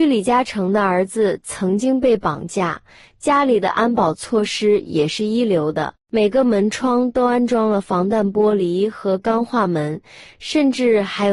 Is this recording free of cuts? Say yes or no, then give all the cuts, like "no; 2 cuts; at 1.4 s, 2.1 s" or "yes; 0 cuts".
yes; 0 cuts